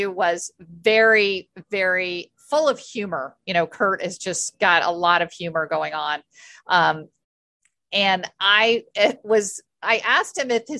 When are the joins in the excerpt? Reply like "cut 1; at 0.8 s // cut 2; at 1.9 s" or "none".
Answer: none